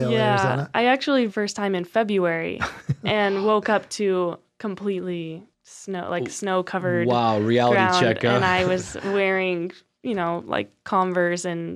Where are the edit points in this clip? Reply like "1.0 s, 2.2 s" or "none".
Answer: 1.3 s, 5.5 s